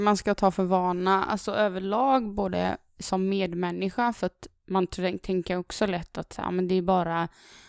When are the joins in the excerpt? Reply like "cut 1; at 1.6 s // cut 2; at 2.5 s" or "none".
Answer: none